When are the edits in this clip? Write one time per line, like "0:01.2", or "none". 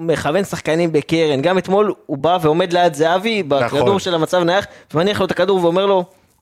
none